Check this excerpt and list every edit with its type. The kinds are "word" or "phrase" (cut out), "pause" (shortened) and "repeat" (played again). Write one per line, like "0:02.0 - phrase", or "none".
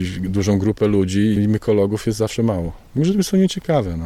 0:01.4 - word